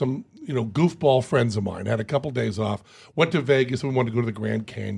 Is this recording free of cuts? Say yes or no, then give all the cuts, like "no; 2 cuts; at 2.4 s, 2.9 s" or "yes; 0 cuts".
yes; 0 cuts